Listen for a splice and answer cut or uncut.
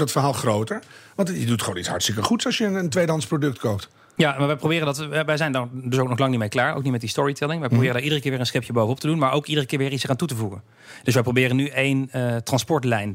uncut